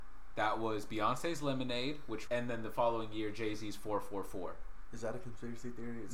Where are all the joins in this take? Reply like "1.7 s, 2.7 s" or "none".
2.3 s